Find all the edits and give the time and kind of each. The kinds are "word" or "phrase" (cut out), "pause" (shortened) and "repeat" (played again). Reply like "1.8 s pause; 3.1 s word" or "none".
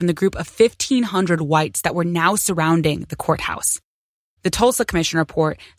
none